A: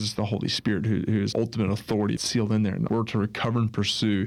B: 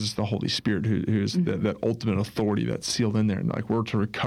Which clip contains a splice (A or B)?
A